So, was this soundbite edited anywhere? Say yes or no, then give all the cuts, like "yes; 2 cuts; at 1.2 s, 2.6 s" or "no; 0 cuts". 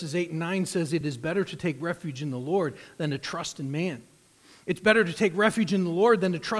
no; 0 cuts